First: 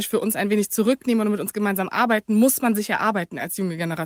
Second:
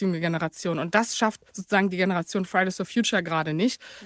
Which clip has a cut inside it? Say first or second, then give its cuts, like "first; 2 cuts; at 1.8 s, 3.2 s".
second; 1 cut; at 1.5 s